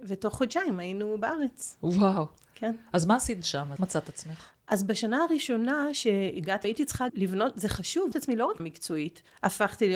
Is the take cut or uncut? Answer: cut